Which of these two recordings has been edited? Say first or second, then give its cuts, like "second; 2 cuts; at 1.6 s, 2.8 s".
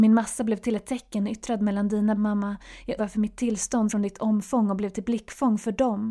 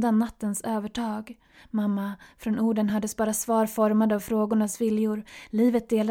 first; 3 cuts; at 2.2 s, 3.0 s, 3.9 s